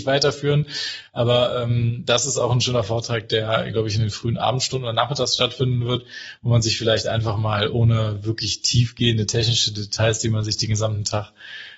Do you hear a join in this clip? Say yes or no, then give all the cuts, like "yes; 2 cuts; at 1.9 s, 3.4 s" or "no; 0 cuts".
no; 0 cuts